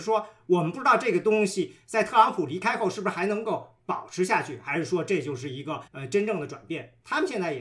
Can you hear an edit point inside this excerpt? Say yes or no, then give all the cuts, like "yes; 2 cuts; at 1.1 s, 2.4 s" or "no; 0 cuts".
yes; 1 cut; at 5.9 s